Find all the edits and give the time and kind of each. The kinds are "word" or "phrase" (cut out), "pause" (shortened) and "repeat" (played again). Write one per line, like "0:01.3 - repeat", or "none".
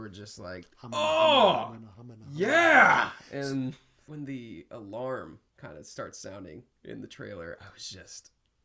0:01.9 - word
0:05.5 - pause